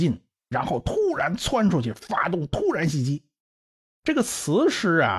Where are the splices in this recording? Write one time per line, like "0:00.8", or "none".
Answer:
0:03.4